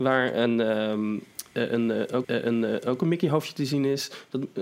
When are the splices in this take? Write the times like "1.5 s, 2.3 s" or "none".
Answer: 2.2 s